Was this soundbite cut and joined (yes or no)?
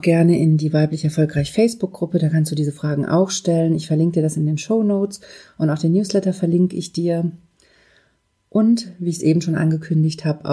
no